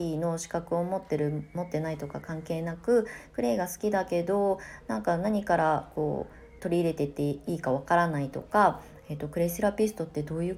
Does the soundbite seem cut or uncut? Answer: cut